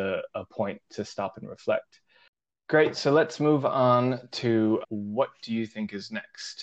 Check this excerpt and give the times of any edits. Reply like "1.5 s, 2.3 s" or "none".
2.5 s, 4.8 s